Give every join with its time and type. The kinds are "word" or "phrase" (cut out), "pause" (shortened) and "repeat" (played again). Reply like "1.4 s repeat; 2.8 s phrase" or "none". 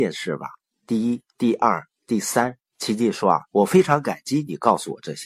1.3 s pause; 2.0 s pause; 2.7 s pause; 3.5 s pause